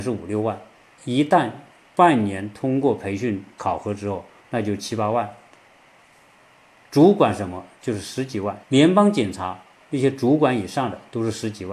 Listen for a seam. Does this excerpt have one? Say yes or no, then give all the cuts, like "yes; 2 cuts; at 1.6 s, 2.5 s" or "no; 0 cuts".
yes; 2 cuts; at 1.0 s, 8.6 s